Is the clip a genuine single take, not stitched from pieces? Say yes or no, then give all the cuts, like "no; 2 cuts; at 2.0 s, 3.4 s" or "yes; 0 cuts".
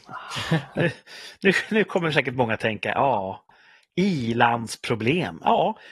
yes; 0 cuts